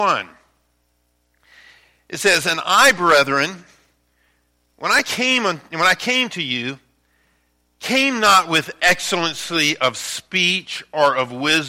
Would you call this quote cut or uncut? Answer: uncut